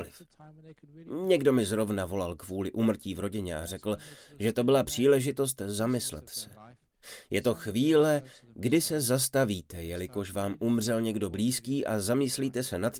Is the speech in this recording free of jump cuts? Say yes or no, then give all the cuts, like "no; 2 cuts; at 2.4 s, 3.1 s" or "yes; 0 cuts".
yes; 0 cuts